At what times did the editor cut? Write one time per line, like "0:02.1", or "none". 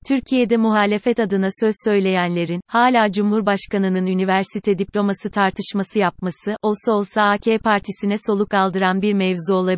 none